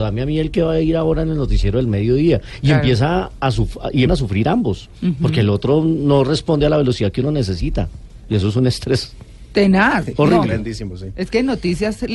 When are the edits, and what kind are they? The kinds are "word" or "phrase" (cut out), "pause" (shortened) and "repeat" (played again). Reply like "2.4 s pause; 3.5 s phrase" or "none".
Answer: 4.1 s word